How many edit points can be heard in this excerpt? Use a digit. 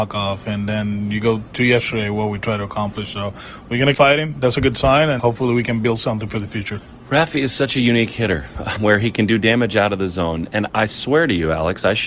4